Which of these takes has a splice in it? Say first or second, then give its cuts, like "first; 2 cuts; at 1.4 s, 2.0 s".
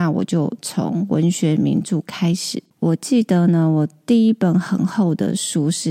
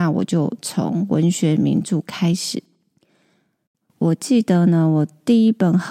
first; 1 cut; at 2.7 s